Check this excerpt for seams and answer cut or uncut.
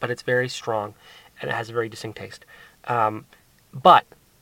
uncut